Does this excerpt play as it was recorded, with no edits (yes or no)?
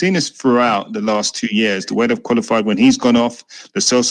yes